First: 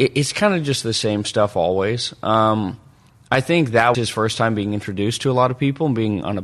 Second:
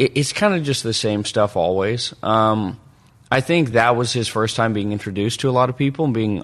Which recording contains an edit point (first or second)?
first